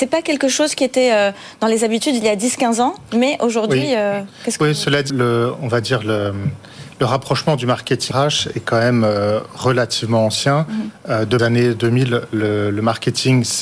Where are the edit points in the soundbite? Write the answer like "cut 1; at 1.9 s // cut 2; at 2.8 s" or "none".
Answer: cut 1; at 5.1 s // cut 2; at 8.1 s // cut 3; at 11.4 s